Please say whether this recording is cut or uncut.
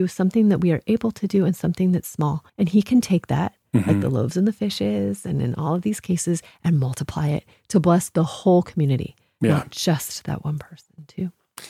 cut